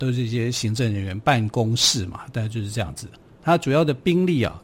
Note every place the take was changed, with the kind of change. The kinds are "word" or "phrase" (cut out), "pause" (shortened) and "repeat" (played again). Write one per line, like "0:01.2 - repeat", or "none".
none